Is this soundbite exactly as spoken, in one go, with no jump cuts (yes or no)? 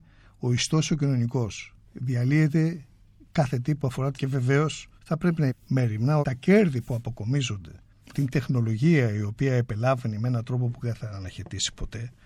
no